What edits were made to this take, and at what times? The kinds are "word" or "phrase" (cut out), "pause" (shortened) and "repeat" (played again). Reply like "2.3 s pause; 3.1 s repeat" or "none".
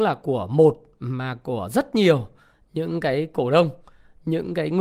none